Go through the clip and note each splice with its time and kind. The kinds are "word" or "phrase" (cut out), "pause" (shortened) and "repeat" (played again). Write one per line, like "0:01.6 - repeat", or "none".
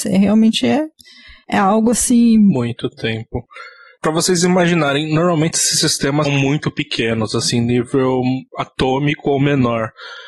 0:06.2 - word